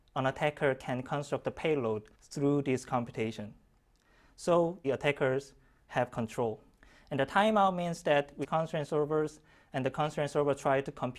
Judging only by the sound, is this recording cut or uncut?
cut